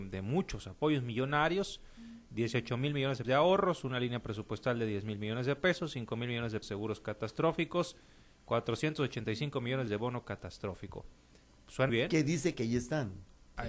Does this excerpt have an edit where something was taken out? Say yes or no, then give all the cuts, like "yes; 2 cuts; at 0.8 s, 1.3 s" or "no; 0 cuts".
yes; 4 cuts; at 3.2 s, 6.6 s, 9.9 s, 11.9 s